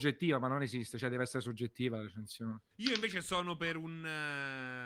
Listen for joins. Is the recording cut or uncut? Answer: cut